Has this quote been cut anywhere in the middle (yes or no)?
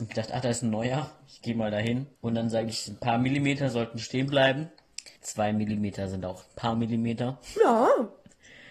yes